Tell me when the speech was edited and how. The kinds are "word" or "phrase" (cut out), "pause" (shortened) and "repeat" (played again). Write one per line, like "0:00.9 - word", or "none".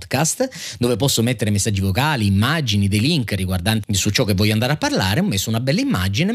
0:03.8 - word